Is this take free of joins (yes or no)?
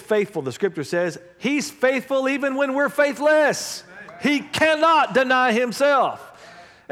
yes